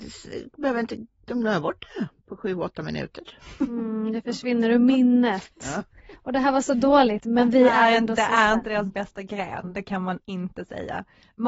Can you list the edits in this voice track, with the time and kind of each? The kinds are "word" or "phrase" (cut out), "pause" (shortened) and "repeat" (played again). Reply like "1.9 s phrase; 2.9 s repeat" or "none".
none